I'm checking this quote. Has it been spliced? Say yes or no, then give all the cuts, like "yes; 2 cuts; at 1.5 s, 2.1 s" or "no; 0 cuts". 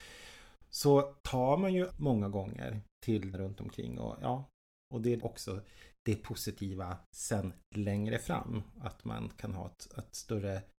yes; 5 cuts; at 1.2 s, 1.9 s, 3.3 s, 5.2 s, 7.0 s